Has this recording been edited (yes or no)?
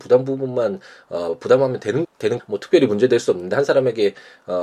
yes